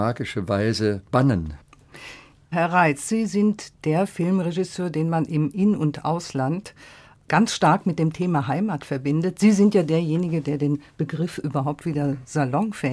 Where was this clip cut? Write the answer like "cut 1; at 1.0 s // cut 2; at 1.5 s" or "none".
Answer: cut 1; at 1.0 s